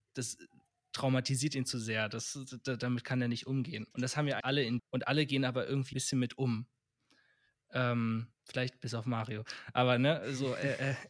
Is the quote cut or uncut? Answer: cut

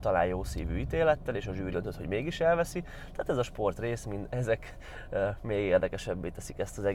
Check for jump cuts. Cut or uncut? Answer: cut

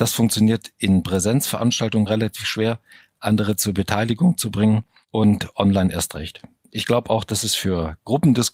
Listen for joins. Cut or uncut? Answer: cut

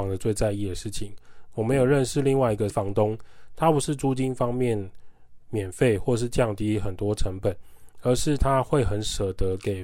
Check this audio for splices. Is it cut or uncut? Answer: cut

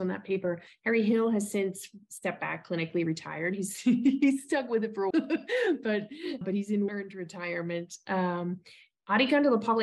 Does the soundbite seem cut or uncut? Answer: cut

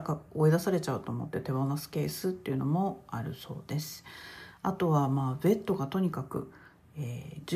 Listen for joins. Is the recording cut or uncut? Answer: uncut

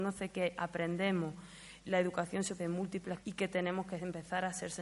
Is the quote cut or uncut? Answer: cut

